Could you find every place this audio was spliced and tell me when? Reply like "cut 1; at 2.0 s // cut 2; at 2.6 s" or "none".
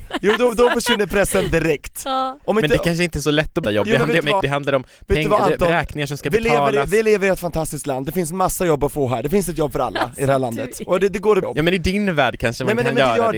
cut 1; at 3.6 s // cut 2; at 4.4 s // cut 3; at 11.4 s